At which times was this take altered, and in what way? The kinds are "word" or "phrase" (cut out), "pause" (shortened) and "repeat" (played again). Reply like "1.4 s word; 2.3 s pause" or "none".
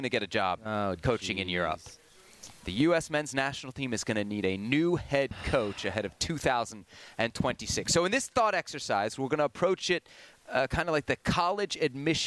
none